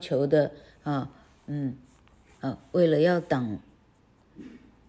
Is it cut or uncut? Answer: uncut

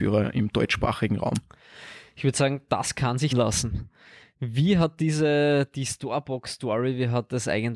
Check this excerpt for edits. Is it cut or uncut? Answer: cut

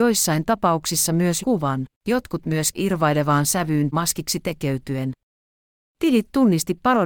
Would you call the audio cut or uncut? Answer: cut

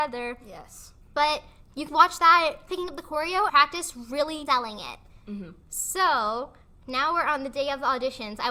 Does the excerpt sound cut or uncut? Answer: cut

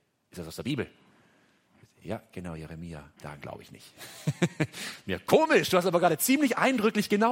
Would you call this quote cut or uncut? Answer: cut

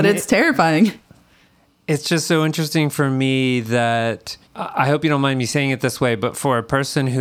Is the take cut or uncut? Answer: cut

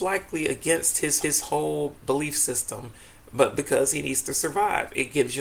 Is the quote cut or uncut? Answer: cut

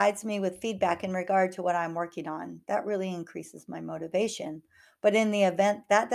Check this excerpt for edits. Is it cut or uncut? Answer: uncut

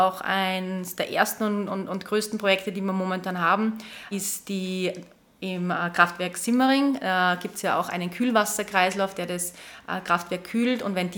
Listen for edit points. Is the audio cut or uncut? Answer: uncut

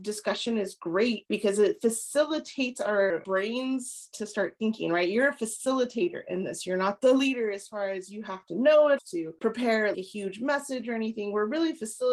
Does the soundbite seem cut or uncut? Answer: cut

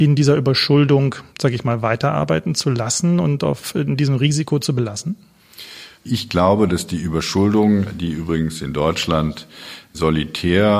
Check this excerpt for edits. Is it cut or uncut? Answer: cut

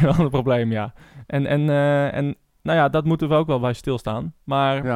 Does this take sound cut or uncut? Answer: uncut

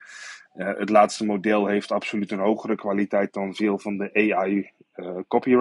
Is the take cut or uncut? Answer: uncut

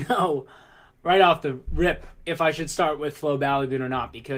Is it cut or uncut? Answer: uncut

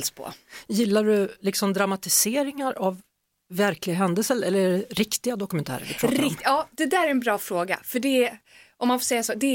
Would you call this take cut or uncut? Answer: uncut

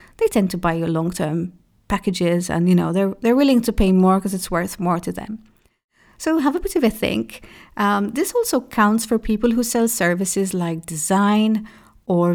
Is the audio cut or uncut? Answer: uncut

